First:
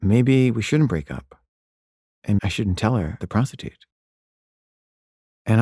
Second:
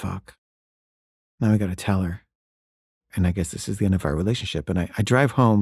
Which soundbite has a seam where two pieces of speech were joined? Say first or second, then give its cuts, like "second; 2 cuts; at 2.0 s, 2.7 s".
first; 2 cuts; at 2.4 s, 3.2 s